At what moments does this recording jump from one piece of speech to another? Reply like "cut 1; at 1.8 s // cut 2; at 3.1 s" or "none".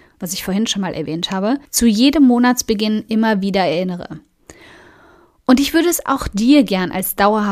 cut 1; at 1.7 s